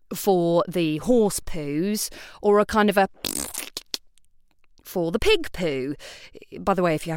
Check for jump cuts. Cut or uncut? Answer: uncut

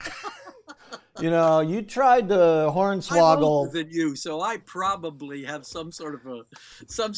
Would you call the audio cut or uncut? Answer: uncut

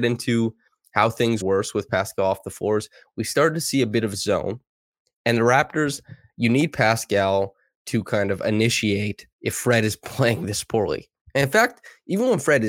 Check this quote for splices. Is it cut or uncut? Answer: cut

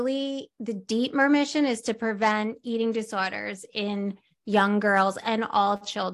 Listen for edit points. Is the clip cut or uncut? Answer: uncut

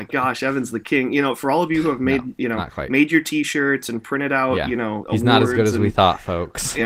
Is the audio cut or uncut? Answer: cut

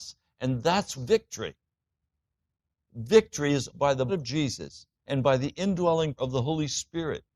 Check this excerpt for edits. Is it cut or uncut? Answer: cut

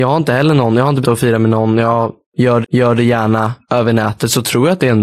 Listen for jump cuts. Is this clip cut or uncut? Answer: cut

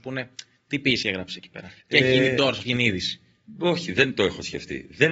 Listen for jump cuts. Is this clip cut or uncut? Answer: cut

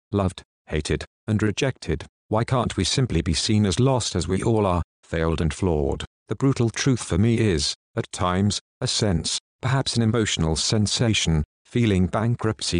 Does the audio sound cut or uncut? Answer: uncut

